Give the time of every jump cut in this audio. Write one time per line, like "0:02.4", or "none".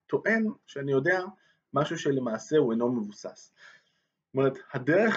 none